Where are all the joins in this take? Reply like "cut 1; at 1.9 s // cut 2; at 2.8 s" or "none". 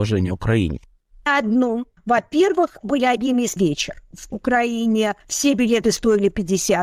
cut 1; at 1.3 s // cut 2; at 2.8 s // cut 3; at 3.6 s // cut 4; at 4.3 s // cut 5; at 5.2 s